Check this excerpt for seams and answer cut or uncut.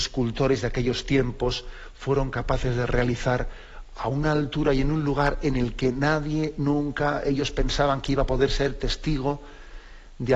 uncut